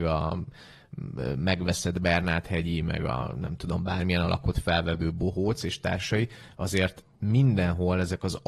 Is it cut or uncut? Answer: uncut